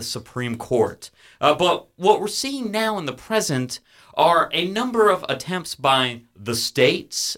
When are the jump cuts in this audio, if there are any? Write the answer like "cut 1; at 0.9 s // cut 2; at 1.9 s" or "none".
none